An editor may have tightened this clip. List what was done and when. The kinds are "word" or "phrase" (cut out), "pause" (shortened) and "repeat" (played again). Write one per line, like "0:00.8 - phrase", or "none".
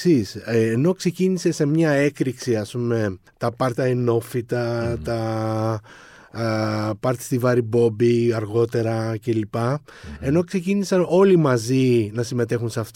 0:03.3 - pause
0:03.8 - word